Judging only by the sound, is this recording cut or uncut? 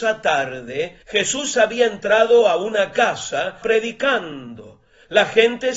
cut